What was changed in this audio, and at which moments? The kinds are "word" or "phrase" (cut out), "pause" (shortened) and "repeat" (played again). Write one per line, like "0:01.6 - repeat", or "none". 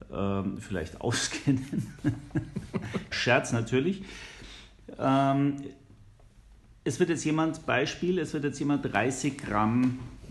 0:03.1 - word
0:08.8 - word